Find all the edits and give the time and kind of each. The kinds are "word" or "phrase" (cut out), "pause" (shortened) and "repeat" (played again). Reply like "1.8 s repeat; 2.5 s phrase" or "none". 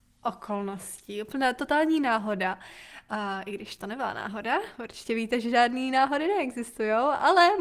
none

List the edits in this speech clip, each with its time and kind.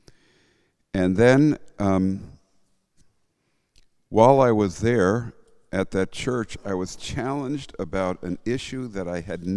none

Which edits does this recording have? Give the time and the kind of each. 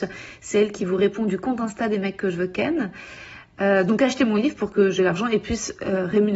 5.0 s word

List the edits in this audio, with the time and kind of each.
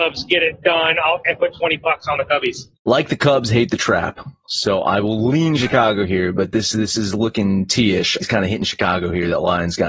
1.2 s phrase; 2.8 s pause; 8.2 s phrase

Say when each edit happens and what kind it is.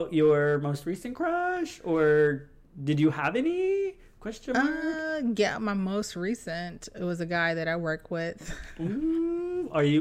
none

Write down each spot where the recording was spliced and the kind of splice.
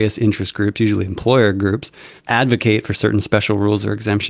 2.2 s pause

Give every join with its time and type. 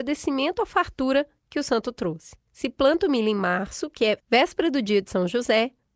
2.5 s pause

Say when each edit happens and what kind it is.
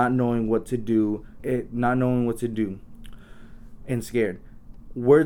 1.4 s word

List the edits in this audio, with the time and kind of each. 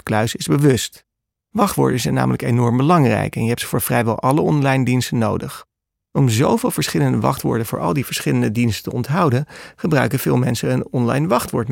none

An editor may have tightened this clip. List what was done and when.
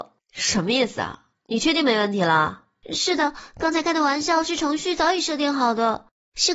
1.4 s pause

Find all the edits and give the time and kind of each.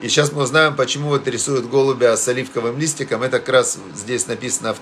none

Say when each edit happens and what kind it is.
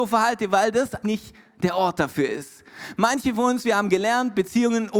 1.0 s word

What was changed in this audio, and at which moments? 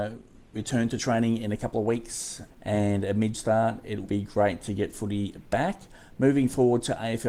2.5 s word; 3.3 s word; 4.0 s word

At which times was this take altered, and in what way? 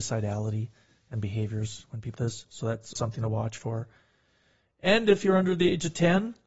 2.2 s word; 3.0 s word

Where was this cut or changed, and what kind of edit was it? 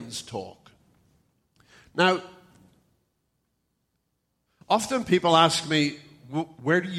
none

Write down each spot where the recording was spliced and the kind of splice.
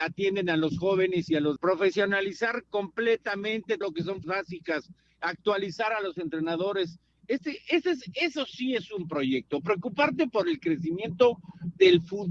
1.6 s word; 3.8 s word; 4.2 s word

